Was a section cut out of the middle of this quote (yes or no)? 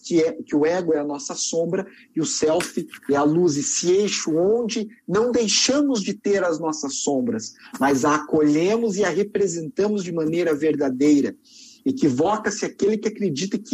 no